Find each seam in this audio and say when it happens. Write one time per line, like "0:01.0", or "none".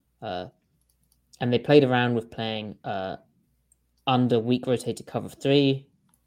none